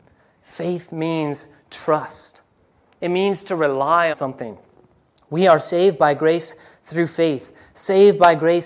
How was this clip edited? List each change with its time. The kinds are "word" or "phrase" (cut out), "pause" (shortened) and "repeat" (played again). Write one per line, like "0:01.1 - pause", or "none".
0:04.1 - word